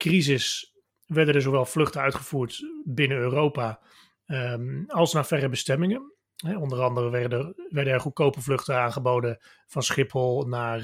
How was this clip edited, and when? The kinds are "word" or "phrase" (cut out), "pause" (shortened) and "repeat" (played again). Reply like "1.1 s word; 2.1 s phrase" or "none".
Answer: none